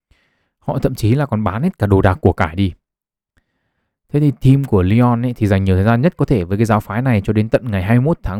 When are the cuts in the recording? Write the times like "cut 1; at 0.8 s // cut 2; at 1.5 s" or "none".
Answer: none